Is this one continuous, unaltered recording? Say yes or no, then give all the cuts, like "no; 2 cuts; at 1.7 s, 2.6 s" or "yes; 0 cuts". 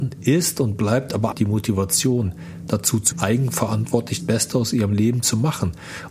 no; 4 cuts; at 1.3 s, 2.7 s, 3.1 s, 4.2 s